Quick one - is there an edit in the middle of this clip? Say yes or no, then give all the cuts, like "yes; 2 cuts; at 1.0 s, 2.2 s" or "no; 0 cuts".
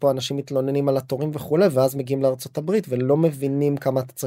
no; 0 cuts